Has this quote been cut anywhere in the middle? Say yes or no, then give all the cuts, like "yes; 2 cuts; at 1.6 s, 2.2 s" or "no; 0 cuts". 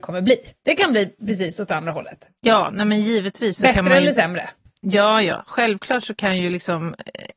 no; 0 cuts